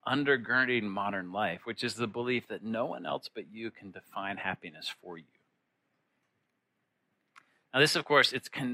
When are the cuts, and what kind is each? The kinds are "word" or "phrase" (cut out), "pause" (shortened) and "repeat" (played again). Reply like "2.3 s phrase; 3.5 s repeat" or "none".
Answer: none